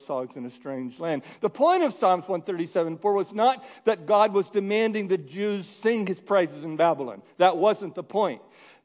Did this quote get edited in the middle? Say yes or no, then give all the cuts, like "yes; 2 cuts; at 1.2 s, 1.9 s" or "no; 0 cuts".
no; 0 cuts